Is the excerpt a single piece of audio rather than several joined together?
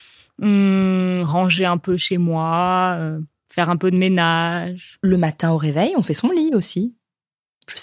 yes; 0 cuts

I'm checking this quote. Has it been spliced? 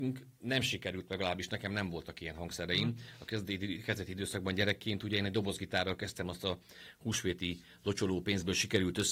no; 0 cuts

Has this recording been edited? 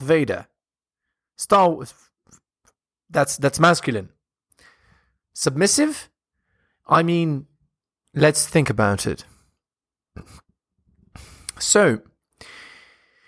no; 0 cuts

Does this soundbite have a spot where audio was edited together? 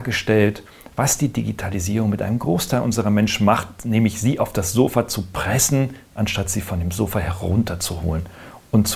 no; 0 cuts

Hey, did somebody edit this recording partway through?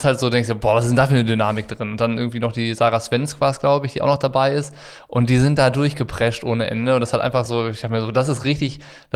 no; 0 cuts

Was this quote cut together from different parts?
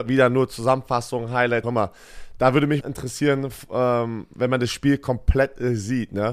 yes; 2 cuts; at 1.6 s, 2.8 s

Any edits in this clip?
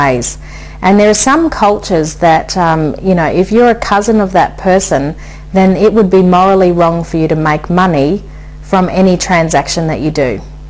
no; 0 cuts

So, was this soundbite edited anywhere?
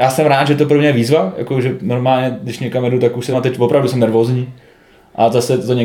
yes; 1 cut; at 3.3 s

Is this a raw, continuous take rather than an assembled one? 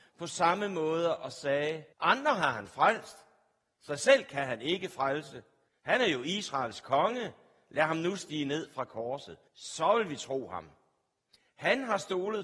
no; 3 cuts; at 1.9 s, 5.7 s, 9.5 s

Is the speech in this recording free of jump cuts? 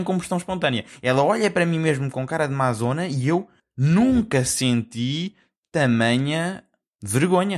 yes; 0 cuts

